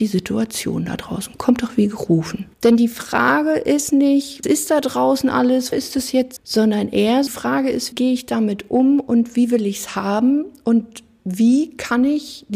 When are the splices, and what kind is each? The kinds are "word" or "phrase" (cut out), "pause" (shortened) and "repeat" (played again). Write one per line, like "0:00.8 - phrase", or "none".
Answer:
0:02.5 - pause
0:04.4 - phrase
0:05.7 - word
0:06.4 - word
0:07.3 - word
0:07.9 - word